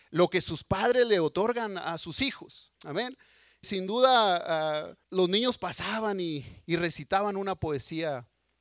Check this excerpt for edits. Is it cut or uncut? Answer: cut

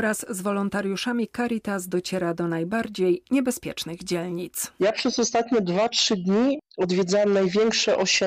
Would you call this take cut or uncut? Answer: uncut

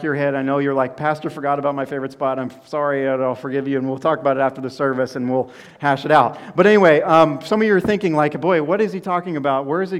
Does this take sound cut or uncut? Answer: uncut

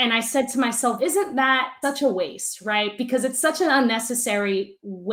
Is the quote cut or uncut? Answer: cut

